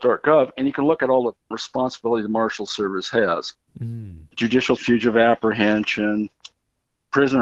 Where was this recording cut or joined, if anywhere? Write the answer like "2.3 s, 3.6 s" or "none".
1.5 s, 4.8 s